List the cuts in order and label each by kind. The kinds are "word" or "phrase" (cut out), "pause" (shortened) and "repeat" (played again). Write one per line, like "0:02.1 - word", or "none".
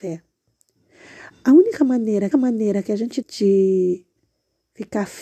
0:02.3 - repeat
0:03.2 - word